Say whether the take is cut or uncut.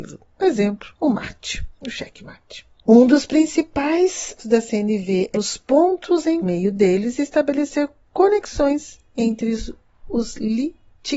cut